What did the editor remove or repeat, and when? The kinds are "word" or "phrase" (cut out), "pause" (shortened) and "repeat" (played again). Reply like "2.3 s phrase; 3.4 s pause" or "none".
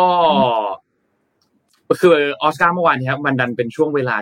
none

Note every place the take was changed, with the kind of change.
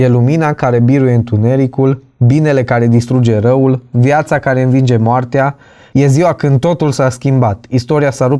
none

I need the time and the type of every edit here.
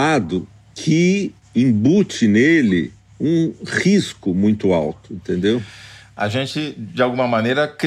none

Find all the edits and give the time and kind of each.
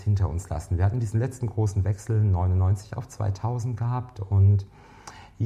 none

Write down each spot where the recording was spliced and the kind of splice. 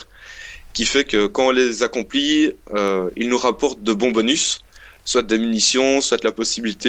none

